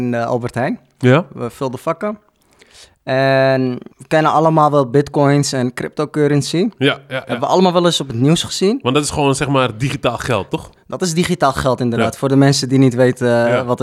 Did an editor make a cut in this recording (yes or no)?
yes